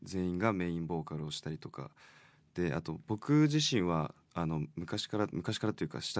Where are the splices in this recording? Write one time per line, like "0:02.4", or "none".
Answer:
none